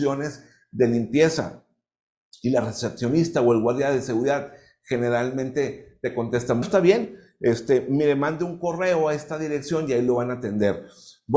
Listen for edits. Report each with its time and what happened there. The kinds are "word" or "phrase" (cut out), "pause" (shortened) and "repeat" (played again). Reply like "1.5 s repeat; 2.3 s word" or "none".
6.6 s word